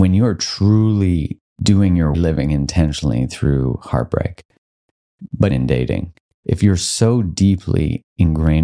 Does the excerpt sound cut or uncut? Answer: cut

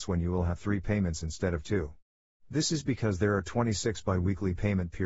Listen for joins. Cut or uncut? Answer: uncut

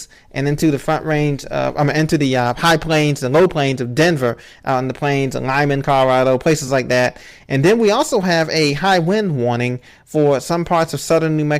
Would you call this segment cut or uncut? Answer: uncut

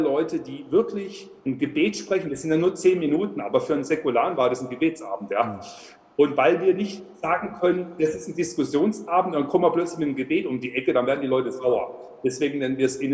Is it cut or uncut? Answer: cut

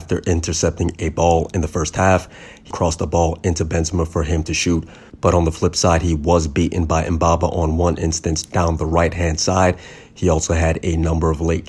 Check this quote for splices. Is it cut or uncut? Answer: cut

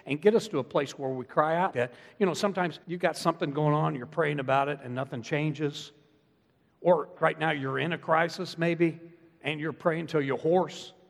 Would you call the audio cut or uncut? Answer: cut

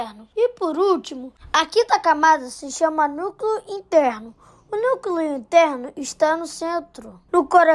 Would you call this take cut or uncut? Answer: uncut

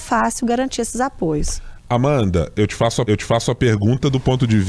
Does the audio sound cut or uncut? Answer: cut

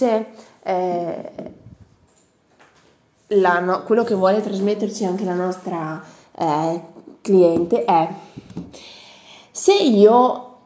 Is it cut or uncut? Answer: uncut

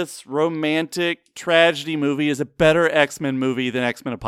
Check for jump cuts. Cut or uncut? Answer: uncut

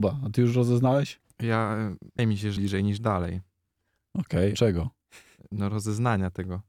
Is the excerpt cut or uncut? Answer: cut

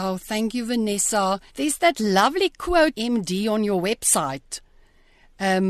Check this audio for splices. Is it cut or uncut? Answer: cut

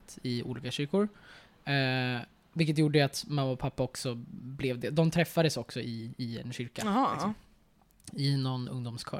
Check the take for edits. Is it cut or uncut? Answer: uncut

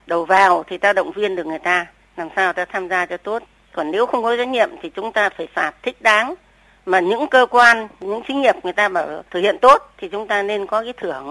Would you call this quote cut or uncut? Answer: cut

